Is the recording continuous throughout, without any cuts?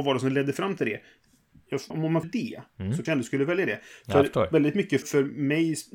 no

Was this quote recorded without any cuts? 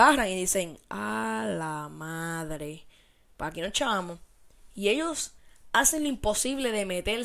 yes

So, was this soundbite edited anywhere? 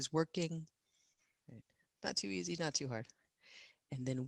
no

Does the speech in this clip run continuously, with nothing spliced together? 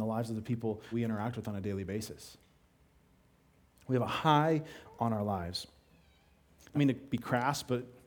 no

